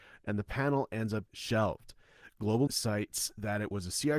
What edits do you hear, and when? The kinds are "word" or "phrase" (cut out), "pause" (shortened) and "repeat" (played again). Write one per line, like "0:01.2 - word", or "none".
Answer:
0:01.3 - word
0:02.7 - word